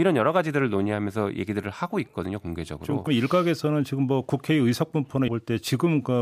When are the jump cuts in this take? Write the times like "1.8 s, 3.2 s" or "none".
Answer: 3.1 s, 5.3 s